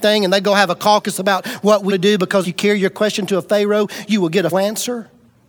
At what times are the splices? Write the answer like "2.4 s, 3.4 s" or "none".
1.9 s, 2.4 s, 4.5 s